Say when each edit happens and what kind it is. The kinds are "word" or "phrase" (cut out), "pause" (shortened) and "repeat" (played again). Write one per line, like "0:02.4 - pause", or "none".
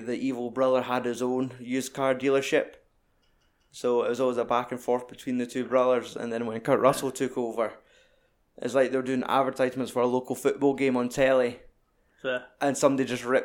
none